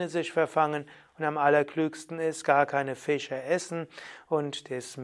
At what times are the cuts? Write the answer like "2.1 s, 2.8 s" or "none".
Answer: none